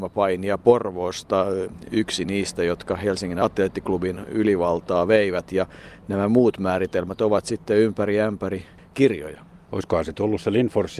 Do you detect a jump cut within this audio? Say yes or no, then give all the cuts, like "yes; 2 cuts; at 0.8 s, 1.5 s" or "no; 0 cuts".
no; 0 cuts